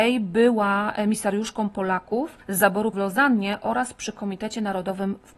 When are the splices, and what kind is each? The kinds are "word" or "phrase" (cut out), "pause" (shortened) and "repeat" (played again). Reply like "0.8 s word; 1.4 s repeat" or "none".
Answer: 2.9 s word